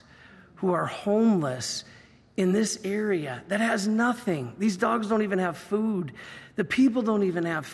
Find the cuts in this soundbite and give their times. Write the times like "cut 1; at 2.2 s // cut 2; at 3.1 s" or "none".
none